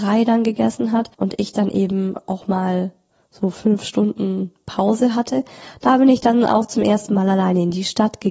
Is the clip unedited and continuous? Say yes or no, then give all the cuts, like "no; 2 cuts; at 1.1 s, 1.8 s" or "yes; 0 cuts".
no; 1 cut; at 1.1 s